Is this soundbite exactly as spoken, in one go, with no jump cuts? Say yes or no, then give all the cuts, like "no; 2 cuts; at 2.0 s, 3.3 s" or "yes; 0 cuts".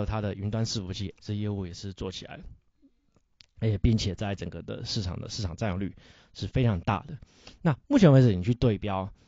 no; 1 cut; at 1.1 s